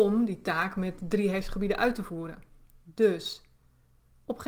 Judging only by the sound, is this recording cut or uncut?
uncut